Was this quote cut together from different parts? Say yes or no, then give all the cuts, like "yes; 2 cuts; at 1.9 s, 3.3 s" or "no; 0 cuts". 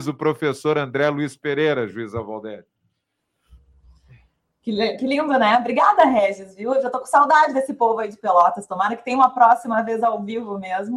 no; 0 cuts